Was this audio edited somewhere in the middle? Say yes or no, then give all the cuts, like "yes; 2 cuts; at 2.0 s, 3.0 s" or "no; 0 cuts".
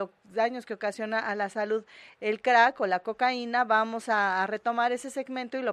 no; 0 cuts